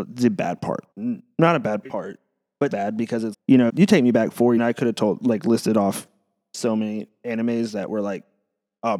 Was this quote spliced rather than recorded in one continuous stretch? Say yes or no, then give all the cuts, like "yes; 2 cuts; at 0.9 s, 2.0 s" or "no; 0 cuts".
yes; 6 cuts; at 0.9 s, 1.8 s, 2.7 s, 3.3 s, 3.7 s, 4.6 s